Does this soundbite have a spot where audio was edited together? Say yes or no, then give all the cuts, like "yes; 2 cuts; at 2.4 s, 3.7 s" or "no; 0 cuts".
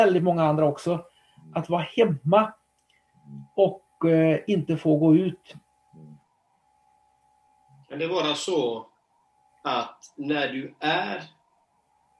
no; 0 cuts